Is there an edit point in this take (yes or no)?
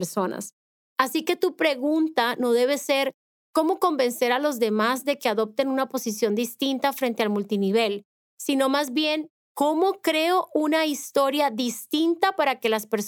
no